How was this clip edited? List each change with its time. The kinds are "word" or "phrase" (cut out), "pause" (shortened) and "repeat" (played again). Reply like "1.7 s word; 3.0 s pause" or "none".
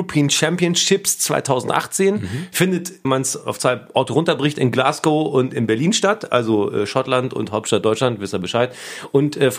3.0 s word